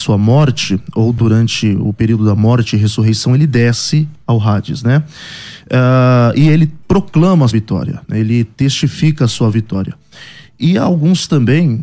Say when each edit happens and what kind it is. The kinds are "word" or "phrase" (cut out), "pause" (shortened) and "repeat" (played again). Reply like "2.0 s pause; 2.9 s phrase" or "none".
7.5 s word